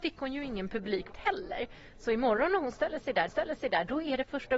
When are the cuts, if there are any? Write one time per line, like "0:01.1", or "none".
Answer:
0:01.1
0:03.3